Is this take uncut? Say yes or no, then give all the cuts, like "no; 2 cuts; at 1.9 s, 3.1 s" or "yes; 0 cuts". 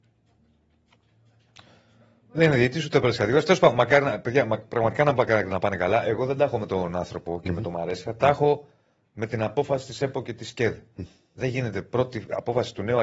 yes; 0 cuts